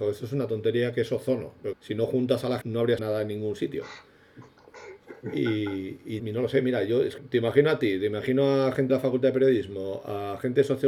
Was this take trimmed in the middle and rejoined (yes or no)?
yes